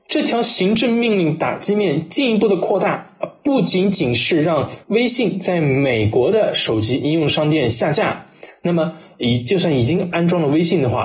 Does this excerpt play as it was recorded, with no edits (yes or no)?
no